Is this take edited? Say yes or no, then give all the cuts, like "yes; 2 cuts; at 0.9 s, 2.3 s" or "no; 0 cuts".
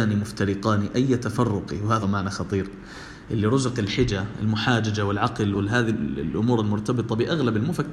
yes; 2 cuts; at 2.0 s, 5.5 s